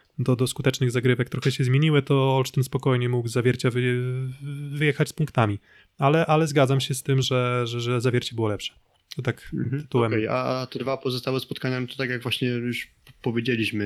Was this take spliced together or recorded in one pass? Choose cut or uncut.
uncut